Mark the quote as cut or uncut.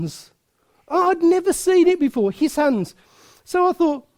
uncut